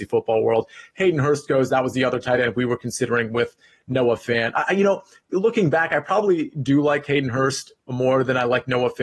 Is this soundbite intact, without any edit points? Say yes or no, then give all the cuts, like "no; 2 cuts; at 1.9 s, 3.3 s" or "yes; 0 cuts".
yes; 0 cuts